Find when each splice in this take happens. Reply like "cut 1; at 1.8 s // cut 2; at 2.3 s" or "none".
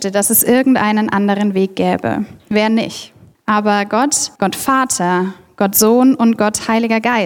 cut 1; at 3.3 s // cut 2; at 4.3 s